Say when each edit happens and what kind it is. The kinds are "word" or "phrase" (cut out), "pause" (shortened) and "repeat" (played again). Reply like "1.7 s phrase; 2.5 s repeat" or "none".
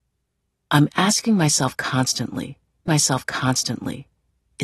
2.9 s repeat